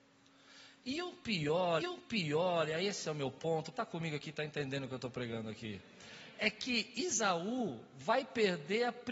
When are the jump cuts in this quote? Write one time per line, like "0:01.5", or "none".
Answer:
0:01.8
0:03.7